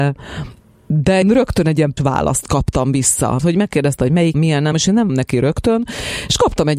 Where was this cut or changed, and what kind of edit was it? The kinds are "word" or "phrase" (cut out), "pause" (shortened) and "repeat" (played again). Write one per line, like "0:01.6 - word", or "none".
0:01.2 - word
0:02.0 - word
0:03.4 - word
0:04.3 - word
0:04.7 - word
0:05.1 - word